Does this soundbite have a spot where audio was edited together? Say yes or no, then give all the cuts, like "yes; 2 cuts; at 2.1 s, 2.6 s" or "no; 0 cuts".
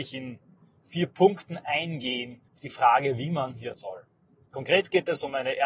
yes; 2 cuts; at 2.5 s, 3.7 s